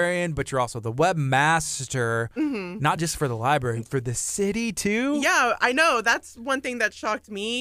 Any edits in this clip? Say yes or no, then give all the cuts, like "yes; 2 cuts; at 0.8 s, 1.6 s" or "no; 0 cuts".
no; 0 cuts